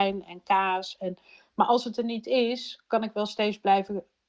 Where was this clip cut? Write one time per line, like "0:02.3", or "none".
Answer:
none